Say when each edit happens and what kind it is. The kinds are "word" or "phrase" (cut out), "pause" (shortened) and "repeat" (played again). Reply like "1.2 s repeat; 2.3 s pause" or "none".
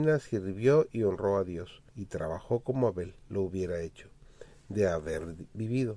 1.9 s pause; 3.2 s pause